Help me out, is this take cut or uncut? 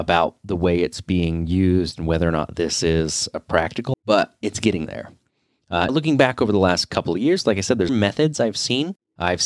cut